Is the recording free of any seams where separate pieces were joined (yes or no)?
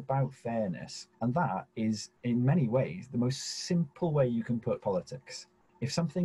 no